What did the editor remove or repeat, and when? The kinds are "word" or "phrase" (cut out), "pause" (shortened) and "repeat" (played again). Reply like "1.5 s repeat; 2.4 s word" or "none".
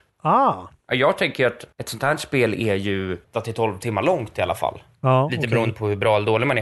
1.7 s pause; 3.2 s word